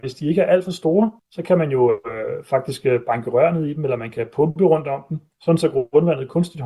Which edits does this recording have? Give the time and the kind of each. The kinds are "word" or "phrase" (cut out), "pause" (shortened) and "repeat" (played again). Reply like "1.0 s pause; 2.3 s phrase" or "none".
1.2 s pause